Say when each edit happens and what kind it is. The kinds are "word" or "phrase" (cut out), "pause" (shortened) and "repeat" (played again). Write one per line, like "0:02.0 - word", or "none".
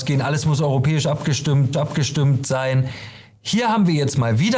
0:01.7 - repeat

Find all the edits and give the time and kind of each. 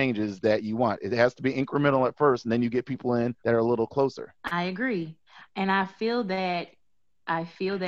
0:03.4 - pause
0:04.4 - pause

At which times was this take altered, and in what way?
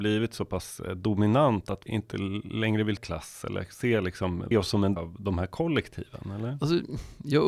0:01.9 - word
0:03.0 - word
0:04.5 - word
0:05.0 - word

